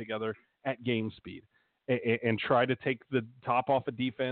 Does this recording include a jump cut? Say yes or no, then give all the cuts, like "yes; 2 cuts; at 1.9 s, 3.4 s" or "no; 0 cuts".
no; 0 cuts